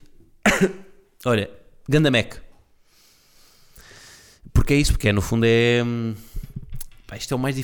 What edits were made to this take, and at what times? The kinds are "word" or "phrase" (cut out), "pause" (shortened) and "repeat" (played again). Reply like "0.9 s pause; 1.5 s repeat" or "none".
none